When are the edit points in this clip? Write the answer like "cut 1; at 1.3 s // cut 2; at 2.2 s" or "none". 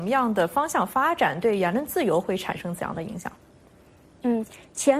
none